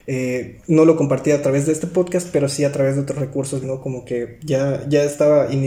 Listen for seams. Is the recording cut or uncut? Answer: cut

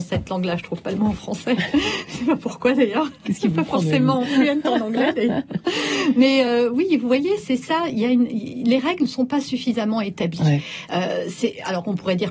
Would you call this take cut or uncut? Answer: uncut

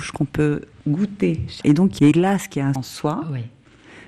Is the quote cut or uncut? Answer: cut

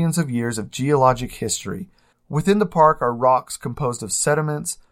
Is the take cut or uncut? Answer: cut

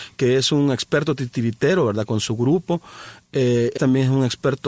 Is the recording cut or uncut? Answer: cut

